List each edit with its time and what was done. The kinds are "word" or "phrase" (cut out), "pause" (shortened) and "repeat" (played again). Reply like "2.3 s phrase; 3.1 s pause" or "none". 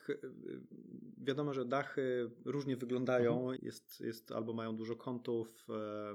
3.6 s phrase